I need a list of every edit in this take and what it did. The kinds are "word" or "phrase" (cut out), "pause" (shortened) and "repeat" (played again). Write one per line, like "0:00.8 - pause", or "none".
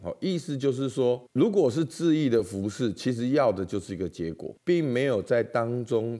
0:01.3 - pause
0:04.6 - pause